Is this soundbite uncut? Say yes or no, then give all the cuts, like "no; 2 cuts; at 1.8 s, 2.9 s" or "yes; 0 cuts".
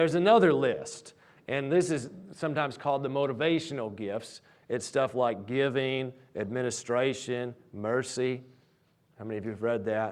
yes; 0 cuts